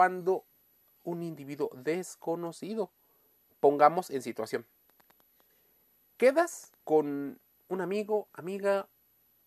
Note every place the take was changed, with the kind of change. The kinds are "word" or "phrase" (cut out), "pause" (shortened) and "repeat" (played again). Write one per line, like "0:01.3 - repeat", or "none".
0:01.0 - word
0:06.8 - pause